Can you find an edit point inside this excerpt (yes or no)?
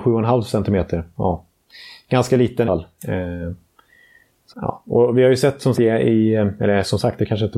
yes